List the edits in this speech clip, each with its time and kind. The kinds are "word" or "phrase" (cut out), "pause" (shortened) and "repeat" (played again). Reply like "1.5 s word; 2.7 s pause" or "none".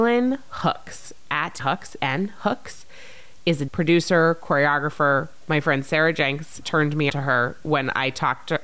1.6 s word; 2.0 s phrase; 3.7 s word; 6.6 s word; 7.1 s word